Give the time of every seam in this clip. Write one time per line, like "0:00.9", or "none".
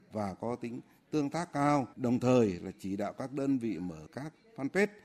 0:01.9